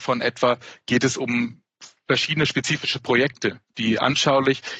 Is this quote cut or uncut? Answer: uncut